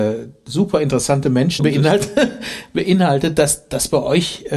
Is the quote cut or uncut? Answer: cut